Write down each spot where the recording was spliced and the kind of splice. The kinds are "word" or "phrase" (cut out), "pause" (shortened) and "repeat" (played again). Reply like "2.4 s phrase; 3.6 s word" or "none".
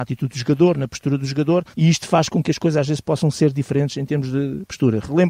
1.7 s pause